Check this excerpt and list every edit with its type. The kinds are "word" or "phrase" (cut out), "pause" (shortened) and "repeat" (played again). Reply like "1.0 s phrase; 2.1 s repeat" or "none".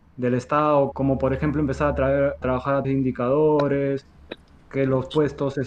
0.9 s word; 2.4 s word; 2.8 s word

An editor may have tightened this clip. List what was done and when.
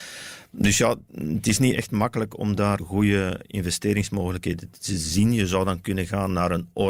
1.1 s word; 2.8 s word

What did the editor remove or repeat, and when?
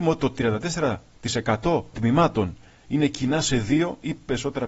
1.9 s word

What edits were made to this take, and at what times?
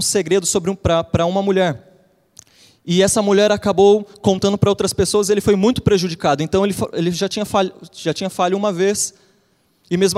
none

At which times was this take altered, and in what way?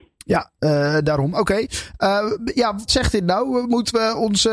2.9 s word

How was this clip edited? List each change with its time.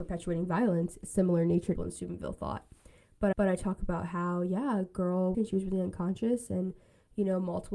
1.0 s word; 1.8 s phrase; 3.3 s repeat; 5.3 s phrase

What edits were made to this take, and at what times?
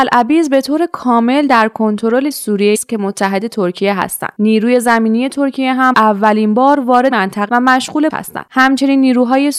2.3 s word; 2.7 s word; 5.9 s word; 7.1 s word; 7.5 s word; 8.1 s word

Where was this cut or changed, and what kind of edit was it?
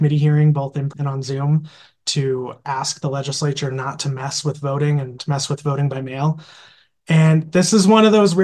0.9 s word; 5.2 s word

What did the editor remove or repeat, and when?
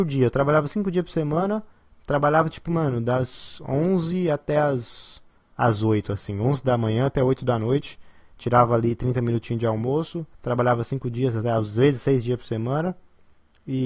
10.3 s pause

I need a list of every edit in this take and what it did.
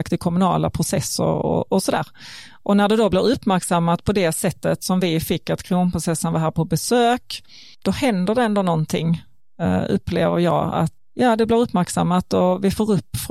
none

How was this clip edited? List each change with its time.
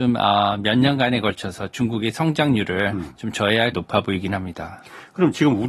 3.7 s word

